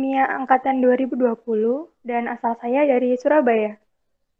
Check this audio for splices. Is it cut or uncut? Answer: uncut